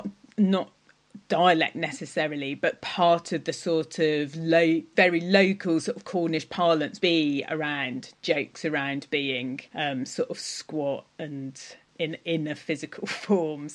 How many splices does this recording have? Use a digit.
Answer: 4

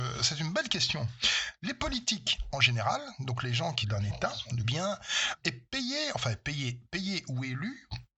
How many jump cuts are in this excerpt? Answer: 3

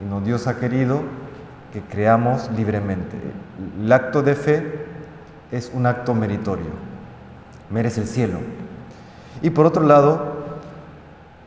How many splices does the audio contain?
0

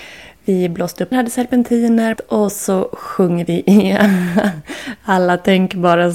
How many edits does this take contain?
2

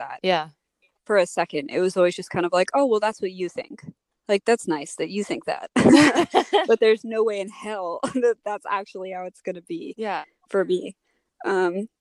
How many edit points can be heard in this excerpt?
1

